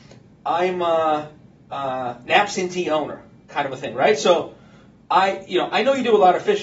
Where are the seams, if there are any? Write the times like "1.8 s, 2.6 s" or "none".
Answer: none